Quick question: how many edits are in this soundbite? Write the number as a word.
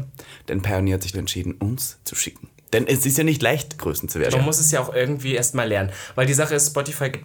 four